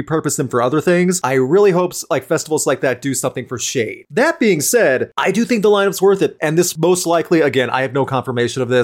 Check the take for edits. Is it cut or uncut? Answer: uncut